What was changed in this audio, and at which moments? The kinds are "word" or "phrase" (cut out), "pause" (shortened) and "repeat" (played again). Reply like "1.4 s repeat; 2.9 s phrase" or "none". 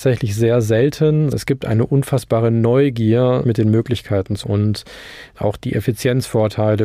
1.3 s word; 3.4 s word; 4.4 s word